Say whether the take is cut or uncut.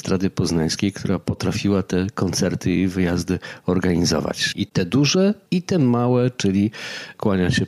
uncut